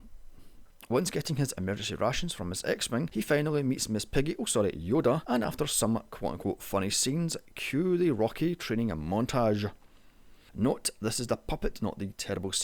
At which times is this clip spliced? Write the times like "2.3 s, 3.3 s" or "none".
none